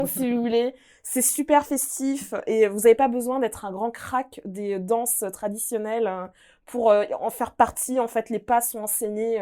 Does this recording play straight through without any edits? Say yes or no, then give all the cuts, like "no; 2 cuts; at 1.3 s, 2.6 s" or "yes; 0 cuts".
yes; 0 cuts